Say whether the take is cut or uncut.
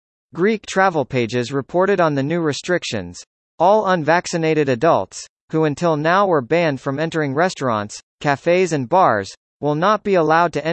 uncut